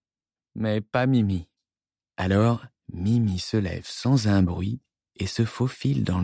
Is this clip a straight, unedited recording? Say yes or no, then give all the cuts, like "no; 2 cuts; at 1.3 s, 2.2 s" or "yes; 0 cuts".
yes; 0 cuts